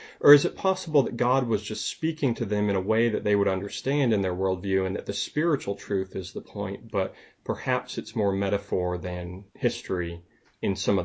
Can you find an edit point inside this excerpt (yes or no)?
yes